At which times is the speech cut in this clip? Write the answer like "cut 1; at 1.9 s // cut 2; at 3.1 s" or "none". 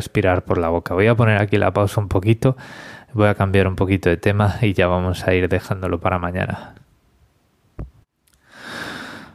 none